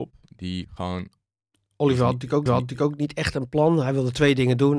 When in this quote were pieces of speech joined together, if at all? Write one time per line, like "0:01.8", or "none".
0:02.5